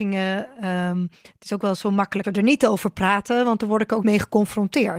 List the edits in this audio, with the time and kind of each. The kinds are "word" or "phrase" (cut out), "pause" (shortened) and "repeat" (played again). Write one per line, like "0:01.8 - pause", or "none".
0:02.2 - word
0:04.0 - word